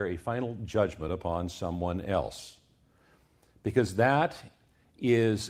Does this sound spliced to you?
no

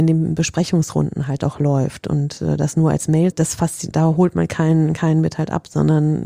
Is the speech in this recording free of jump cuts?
no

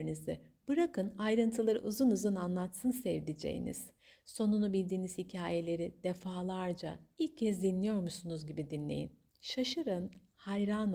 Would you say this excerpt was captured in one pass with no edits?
yes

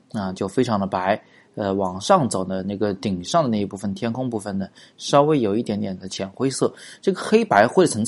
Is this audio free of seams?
yes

